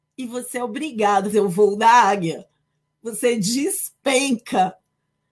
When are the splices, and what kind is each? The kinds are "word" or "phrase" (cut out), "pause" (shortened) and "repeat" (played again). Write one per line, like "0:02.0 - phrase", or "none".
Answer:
0:01.3 - word

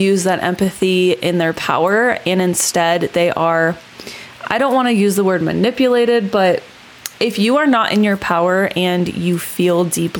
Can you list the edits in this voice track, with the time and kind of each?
0:07.1 - pause

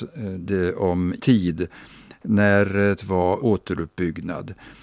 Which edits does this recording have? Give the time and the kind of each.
0:01.2 - word
0:03.0 - word
0:03.4 - word

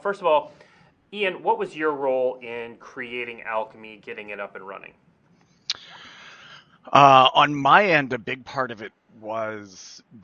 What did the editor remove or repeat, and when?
none

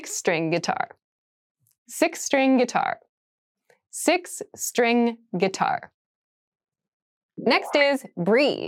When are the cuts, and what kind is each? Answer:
none

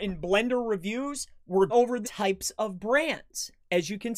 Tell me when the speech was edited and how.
0:01.7 - word
0:02.0 - word

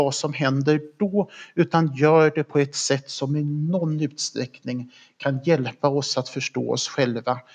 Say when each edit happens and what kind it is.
none

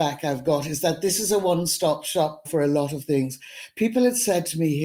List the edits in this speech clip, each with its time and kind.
0:02.5 - word

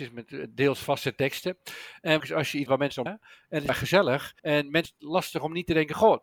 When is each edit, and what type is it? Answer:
0:02.2 - phrase
0:02.7 - phrase
0:03.1 - word
0:03.7 - word
0:04.4 - pause
0:04.8 - phrase

